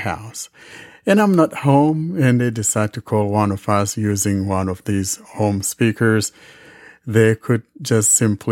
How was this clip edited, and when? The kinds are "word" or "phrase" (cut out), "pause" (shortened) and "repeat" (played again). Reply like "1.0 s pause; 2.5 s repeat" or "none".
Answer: none